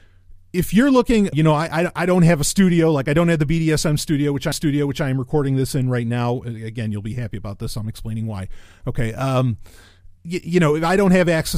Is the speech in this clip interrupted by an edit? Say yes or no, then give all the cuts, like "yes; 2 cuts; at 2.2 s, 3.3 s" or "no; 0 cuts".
yes; 3 cuts; at 1.3 s, 4.5 s, 10.2 s